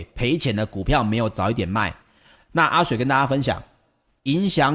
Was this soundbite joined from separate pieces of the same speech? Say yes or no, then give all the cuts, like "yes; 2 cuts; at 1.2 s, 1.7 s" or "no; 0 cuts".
no; 0 cuts